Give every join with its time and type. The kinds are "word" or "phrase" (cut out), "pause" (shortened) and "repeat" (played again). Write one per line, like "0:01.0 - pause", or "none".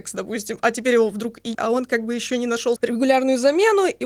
0:01.5 - word
0:02.8 - word